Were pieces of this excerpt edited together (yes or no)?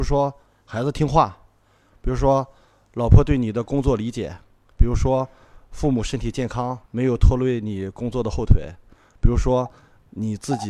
yes